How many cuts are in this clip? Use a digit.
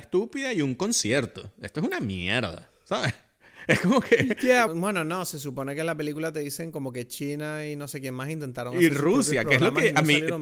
1